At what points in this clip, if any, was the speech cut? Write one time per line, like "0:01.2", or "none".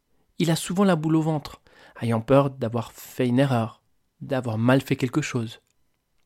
none